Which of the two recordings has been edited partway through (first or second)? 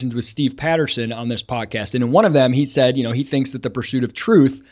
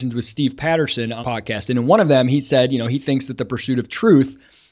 second